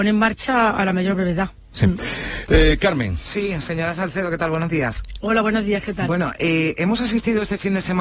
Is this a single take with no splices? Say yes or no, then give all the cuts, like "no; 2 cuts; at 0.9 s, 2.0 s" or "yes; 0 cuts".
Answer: yes; 0 cuts